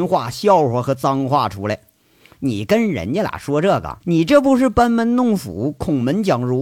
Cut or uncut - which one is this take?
cut